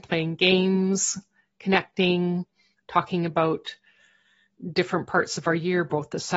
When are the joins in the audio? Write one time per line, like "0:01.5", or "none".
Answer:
none